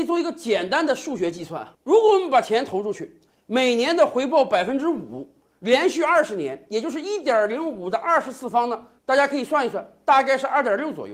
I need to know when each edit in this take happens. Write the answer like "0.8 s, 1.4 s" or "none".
none